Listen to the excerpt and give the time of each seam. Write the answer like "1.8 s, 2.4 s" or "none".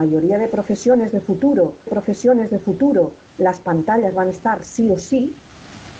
1.9 s